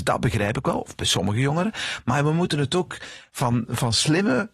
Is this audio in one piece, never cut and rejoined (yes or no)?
yes